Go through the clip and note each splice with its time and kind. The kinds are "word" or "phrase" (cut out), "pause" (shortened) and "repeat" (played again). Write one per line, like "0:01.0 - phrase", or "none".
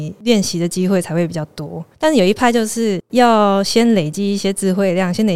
0:01.9 - pause